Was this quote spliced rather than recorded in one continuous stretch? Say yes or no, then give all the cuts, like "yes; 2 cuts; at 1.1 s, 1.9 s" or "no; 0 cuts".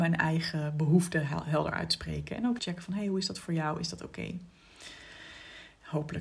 yes; 1 cut; at 2.6 s